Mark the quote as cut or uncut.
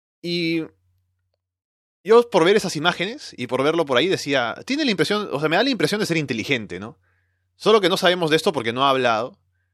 uncut